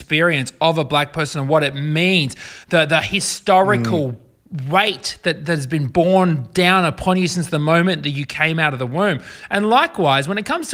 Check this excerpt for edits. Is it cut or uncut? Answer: uncut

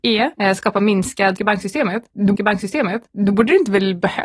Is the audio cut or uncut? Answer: cut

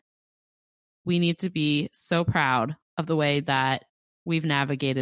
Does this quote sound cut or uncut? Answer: cut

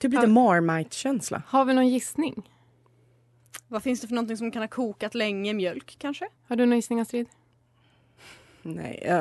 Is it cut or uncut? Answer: cut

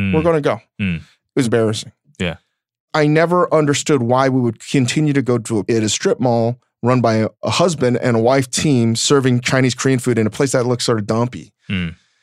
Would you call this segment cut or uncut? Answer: cut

